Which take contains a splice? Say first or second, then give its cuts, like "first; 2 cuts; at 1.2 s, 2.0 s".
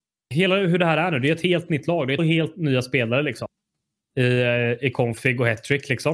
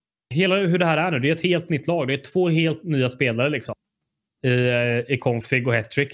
first; 1 cut; at 2.2 s